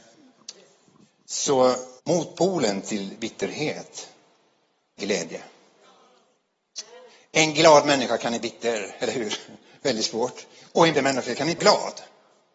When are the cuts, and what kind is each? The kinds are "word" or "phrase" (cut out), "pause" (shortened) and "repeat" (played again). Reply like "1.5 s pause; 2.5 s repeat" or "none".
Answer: 2.0 s pause; 5.0 s phrase; 8.4 s word; 10.9 s word; 11.6 s word

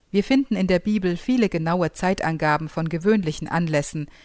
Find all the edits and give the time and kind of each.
none

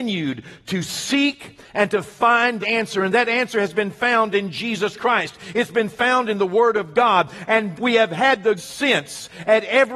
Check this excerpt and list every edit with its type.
2.6 s phrase; 7.8 s word; 8.6 s word

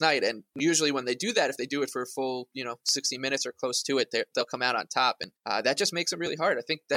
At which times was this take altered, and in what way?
5.4 s pause

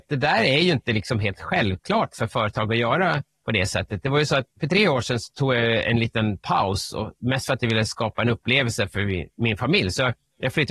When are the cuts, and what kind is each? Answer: 4.5 s pause

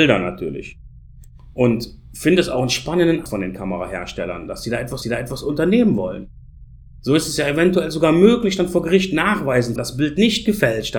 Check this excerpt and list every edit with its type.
3.3 s word; 5.0 s repeat; 9.8 s phrase

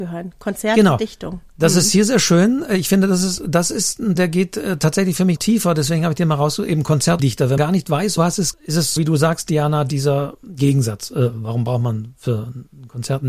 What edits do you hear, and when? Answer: 4.2 s word; 5.4 s word; 7.2 s word; 7.6 s word; 8.2 s word; 8.5 s word; 9.0 s word

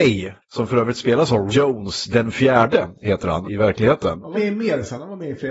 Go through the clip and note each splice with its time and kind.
1.5 s word; 3.4 s word; 4.3 s phrase

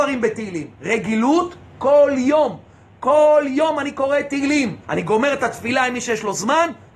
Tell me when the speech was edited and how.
4.8 s pause

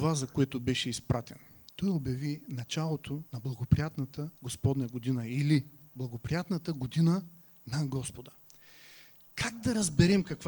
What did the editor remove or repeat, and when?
3.3 s pause; 4.4 s pause

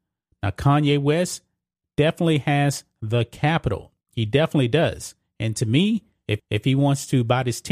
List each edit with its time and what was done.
4.0 s pause; 6.4 s repeat

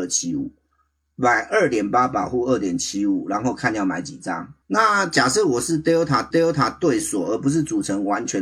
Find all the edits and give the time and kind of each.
4.6 s pause; 6.3 s repeat

